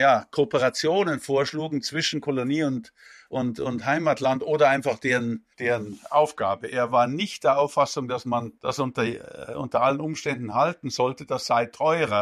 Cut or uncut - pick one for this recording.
cut